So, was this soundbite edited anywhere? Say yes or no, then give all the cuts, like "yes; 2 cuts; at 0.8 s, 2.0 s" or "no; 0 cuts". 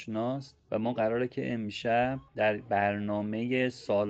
yes; 1 cut; at 2.3 s